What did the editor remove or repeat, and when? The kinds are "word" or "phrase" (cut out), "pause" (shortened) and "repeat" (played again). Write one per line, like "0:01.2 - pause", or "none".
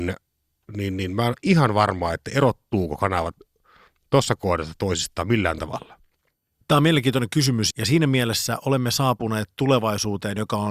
0:07.7 - word